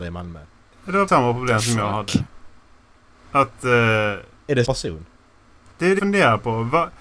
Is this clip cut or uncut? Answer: cut